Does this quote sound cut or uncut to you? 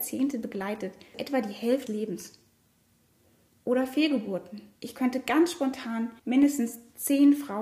cut